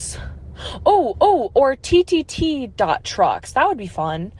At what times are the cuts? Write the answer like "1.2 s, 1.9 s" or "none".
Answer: 1.1 s